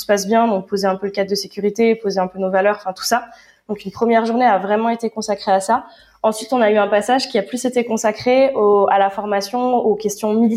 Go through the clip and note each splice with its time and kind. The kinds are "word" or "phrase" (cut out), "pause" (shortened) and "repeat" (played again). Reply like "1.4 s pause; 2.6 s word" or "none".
none